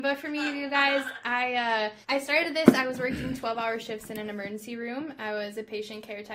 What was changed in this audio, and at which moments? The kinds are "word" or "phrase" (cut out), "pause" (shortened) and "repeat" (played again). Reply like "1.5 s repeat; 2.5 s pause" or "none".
2.0 s pause